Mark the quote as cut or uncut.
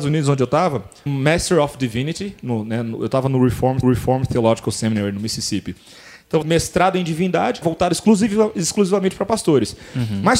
cut